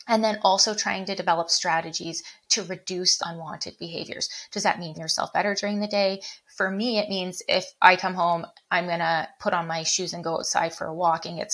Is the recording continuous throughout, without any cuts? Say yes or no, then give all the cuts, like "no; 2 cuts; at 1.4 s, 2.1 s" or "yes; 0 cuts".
no; 3 cuts; at 3.2 s, 4.9 s, 7.8 s